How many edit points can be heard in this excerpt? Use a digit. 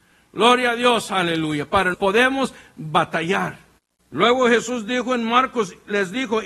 2